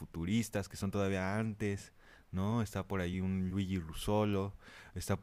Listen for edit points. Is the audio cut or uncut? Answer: uncut